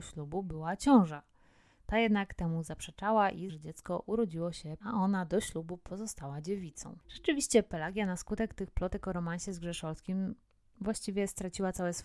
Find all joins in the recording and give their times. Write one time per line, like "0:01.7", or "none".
0:03.5
0:04.8

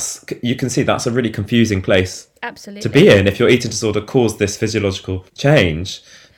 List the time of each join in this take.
0:05.3

